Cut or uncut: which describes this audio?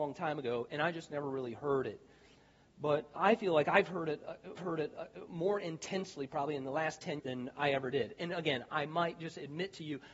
cut